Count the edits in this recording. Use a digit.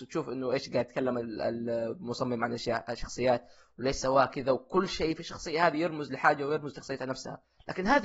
0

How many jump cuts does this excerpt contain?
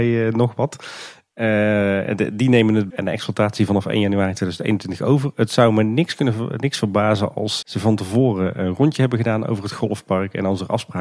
2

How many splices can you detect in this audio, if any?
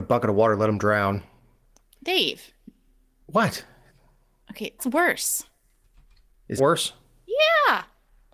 2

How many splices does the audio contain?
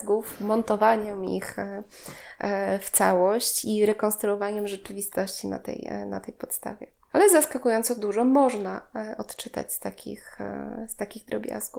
0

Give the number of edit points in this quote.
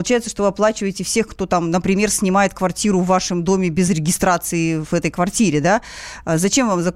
0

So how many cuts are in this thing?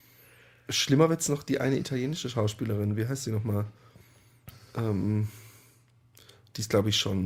0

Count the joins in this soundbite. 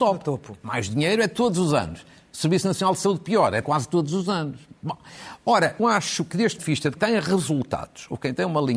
4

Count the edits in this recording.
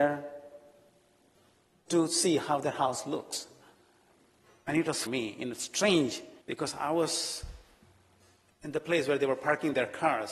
3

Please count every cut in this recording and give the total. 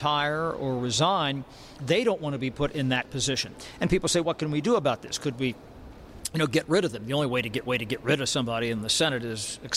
3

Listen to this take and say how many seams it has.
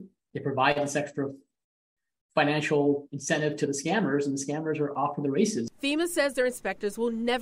0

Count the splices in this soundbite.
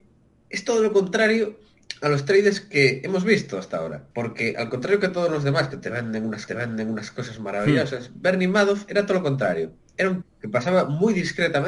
3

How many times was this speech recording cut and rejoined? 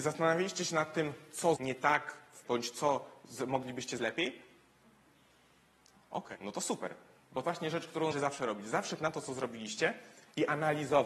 7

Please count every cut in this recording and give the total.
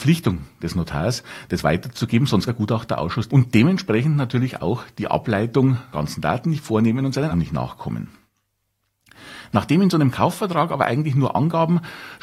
4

